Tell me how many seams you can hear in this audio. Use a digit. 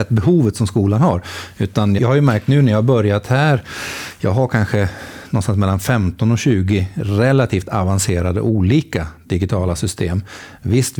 1